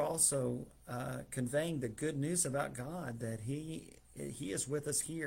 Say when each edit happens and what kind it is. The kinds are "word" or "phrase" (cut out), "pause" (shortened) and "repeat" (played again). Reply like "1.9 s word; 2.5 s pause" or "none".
none